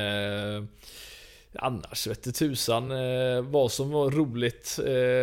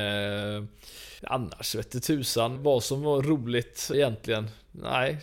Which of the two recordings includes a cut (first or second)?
second